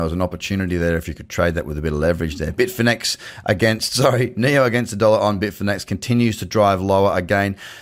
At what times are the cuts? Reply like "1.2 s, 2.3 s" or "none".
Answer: none